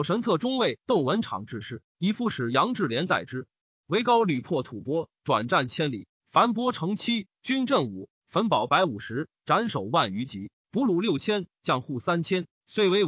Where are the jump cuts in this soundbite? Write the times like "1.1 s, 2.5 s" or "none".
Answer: none